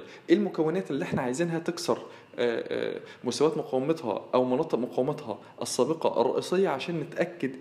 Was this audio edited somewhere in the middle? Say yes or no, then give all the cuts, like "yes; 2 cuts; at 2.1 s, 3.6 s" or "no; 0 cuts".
no; 0 cuts